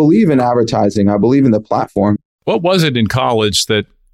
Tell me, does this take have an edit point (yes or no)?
no